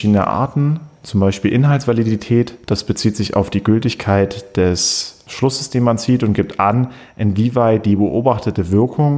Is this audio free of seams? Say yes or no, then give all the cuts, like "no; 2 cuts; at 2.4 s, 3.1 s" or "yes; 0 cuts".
no; 1 cut; at 2.6 s